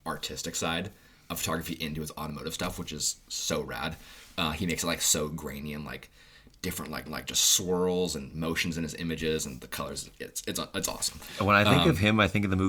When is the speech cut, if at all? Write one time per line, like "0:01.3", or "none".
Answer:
0:07.1